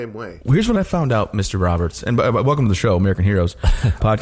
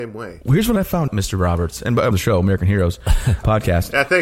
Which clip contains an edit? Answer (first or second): second